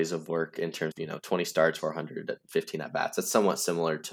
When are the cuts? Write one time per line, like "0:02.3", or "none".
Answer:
0:00.9
0:01.8